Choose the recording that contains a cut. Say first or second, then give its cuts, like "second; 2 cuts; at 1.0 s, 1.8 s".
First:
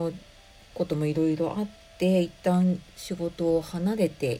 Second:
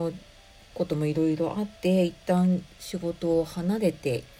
second; 1 cut; at 1.8 s